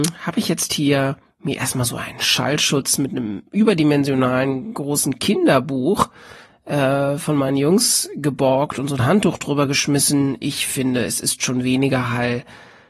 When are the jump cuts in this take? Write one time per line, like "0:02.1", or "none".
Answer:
none